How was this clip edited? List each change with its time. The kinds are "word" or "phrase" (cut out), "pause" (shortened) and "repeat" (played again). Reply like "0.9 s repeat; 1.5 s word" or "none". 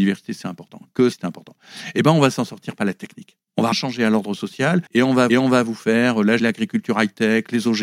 1.1 s word; 3.7 s word; 4.9 s pause; 5.3 s repeat; 6.4 s word